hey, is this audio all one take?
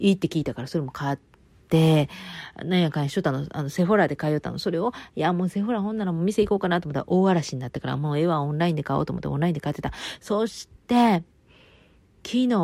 yes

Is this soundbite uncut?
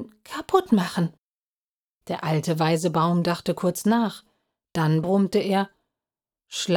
yes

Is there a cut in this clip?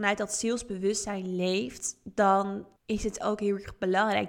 yes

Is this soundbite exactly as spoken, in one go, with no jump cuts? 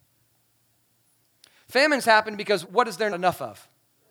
no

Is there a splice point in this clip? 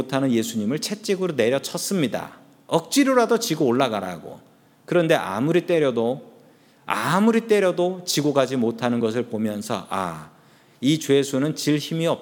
no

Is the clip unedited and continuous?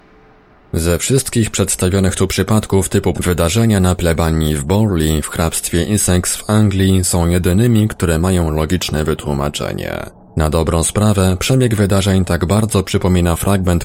no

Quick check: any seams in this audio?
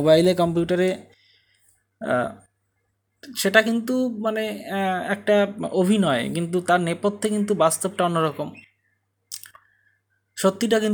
no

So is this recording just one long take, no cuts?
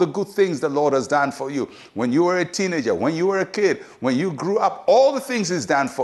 yes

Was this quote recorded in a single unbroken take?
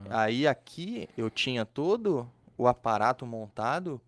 yes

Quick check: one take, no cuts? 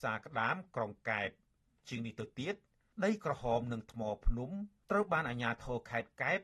yes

